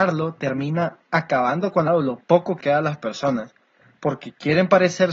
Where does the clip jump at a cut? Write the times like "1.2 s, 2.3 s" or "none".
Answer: 1.0 s, 1.9 s, 2.6 s